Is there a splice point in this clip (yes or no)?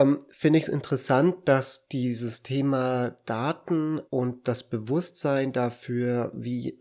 yes